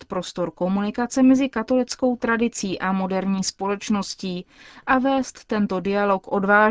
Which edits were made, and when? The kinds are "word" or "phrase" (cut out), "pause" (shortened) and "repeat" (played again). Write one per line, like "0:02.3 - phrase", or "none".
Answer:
none